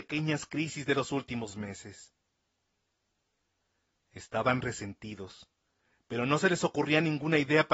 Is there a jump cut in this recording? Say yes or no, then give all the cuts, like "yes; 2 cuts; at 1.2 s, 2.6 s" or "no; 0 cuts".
no; 0 cuts